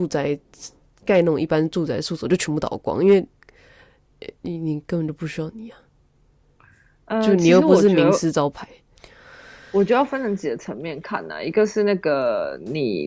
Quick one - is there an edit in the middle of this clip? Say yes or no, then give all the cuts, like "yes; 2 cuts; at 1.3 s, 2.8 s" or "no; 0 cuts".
no; 0 cuts